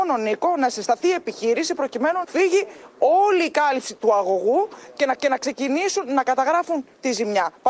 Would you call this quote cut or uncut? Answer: cut